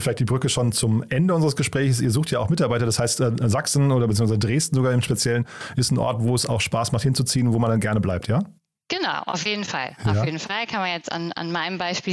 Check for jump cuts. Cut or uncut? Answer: uncut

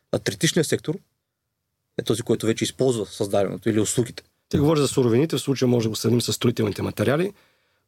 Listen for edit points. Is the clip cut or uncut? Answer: uncut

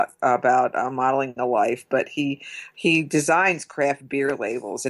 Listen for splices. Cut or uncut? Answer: uncut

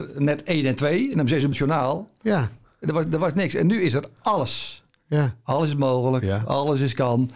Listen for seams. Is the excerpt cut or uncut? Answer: cut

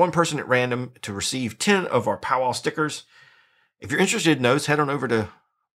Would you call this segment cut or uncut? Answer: uncut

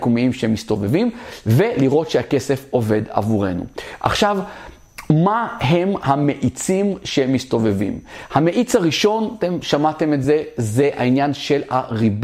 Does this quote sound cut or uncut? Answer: uncut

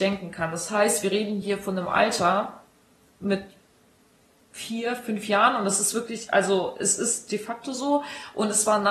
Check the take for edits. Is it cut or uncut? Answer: uncut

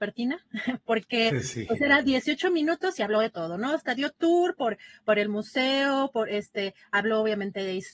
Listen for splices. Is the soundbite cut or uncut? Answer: uncut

